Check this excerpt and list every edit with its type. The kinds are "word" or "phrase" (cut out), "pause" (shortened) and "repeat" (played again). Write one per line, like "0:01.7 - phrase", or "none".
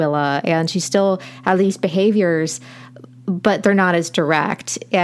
none